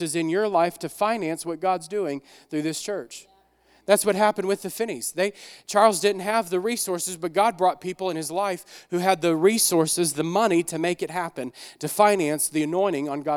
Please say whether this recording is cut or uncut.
uncut